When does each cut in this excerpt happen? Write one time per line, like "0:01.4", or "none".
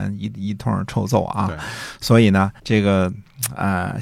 0:02.6